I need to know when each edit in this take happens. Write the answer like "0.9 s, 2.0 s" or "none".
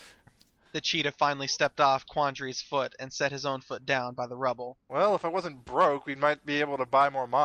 4.8 s